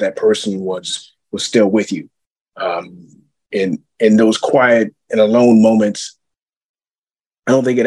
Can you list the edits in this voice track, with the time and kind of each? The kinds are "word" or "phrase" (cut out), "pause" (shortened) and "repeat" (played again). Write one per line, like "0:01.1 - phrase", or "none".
none